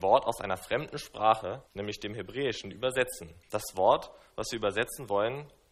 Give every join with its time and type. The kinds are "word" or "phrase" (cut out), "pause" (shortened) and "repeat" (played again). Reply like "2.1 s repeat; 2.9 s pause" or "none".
1.7 s pause; 3.4 s pause